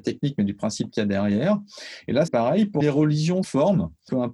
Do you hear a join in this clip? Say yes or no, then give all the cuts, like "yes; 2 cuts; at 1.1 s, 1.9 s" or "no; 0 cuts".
yes; 3 cuts; at 2.3 s, 2.8 s, 3.4 s